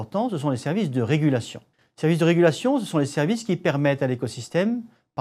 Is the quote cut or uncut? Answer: cut